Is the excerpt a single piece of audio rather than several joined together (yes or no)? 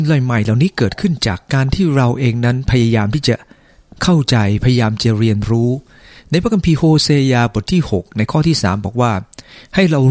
yes